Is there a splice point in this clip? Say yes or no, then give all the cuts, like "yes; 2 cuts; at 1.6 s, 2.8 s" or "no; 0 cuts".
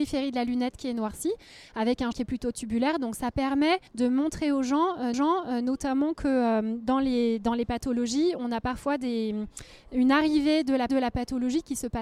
yes; 4 cuts; at 2.1 s, 3.9 s, 5.1 s, 10.9 s